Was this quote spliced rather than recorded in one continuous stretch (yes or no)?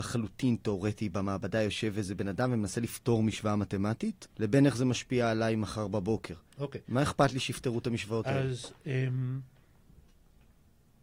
yes